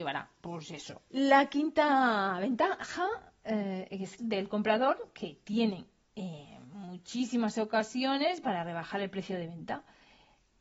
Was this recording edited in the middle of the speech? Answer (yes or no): yes